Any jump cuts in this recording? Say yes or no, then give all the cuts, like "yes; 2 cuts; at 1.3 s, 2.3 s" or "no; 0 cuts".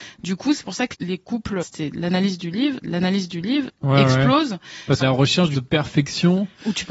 yes; 5 cuts; at 0.9 s, 1.6 s, 2.8 s, 5.0 s, 5.5 s